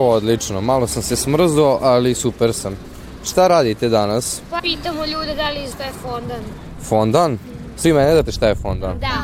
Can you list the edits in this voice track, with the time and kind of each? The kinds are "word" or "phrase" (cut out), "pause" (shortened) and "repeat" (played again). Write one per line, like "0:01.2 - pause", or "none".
0:04.6 - word
0:05.7 - word
0:07.8 - word
0:08.2 - word